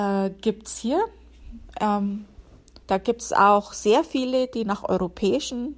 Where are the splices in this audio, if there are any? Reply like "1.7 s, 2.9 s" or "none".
2.8 s